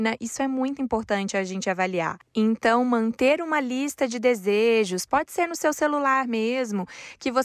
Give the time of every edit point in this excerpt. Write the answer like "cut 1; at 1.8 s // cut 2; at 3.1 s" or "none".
none